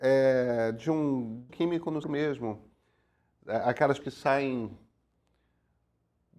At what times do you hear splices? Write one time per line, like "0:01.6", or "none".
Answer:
0:01.5
0:02.0
0:04.0